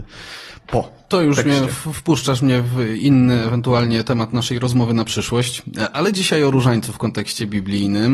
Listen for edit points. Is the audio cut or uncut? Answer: uncut